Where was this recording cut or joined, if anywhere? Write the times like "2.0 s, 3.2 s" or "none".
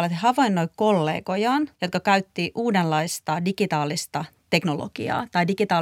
1.7 s